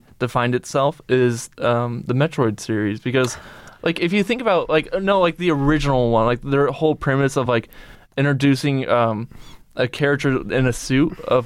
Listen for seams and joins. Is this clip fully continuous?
yes; 0 cuts

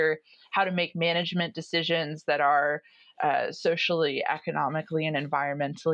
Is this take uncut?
yes; 0 cuts

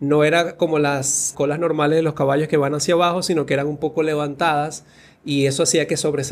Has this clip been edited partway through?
yes; 1 cut; at 1.3 s

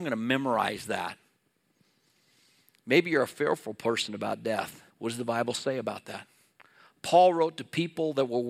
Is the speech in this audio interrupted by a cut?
yes; 1 cut; at 4.9 s

